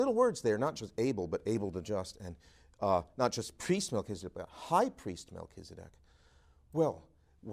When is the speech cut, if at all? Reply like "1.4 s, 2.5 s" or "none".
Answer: none

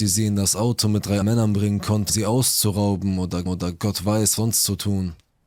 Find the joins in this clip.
1.2 s, 2.1 s, 3.5 s, 4.4 s

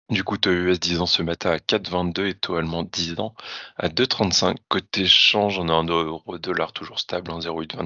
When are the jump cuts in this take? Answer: 4.6 s

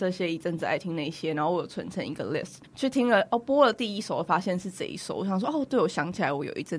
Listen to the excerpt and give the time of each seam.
2.7 s

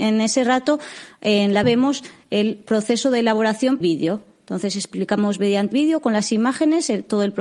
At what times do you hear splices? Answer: 1.6 s, 3.8 s, 5.7 s

